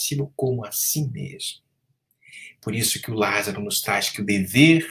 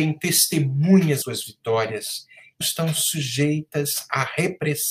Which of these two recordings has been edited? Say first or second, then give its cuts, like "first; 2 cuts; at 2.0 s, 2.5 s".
second; 2 cuts; at 1.2 s, 2.6 s